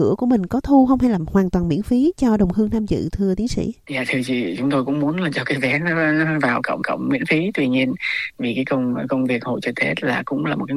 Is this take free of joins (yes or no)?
no